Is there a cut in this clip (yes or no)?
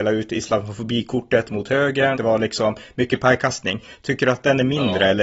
yes